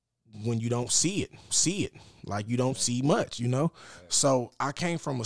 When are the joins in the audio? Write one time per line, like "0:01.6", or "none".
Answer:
0:01.5